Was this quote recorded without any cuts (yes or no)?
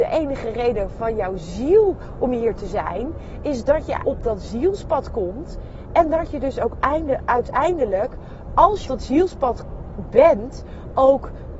no